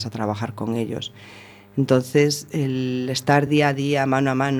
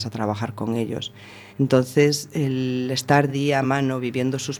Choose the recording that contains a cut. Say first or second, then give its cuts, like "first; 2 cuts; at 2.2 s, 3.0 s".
second; 3 cuts; at 1.5 s, 3.3 s, 3.6 s